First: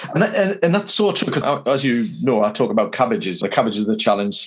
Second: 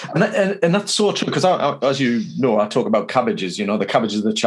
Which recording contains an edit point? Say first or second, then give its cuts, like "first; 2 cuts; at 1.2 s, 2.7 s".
first; 2 cuts; at 1.4 s, 3.4 s